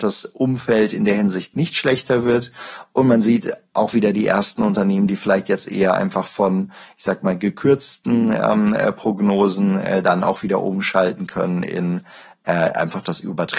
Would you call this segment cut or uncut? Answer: uncut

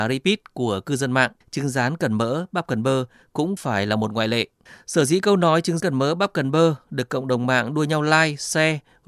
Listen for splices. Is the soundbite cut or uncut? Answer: cut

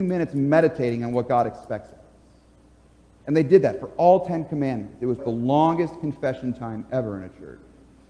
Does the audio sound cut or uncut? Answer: cut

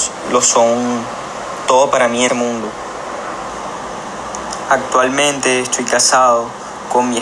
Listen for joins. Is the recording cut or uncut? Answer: cut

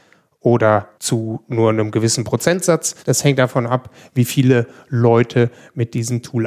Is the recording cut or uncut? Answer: cut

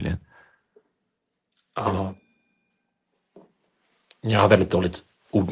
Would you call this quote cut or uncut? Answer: uncut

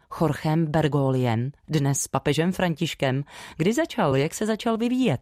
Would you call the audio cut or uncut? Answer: uncut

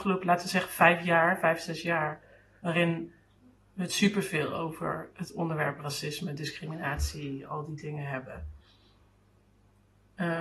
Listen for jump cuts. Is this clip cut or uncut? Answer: uncut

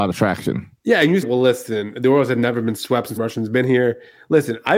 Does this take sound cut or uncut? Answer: cut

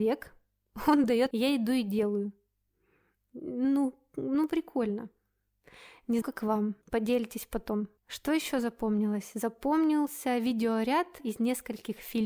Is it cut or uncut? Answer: cut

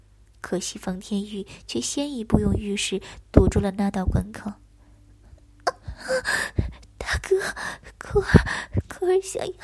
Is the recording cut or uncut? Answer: uncut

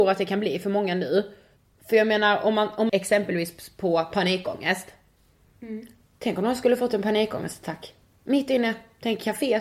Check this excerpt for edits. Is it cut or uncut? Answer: cut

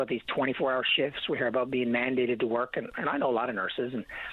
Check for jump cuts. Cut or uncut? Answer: uncut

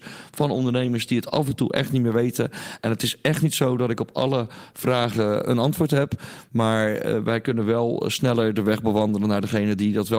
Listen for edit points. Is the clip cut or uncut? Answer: cut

